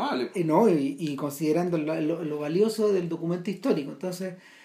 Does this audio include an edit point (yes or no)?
no